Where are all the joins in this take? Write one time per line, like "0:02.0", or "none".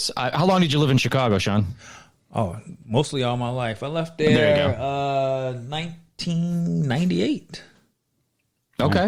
none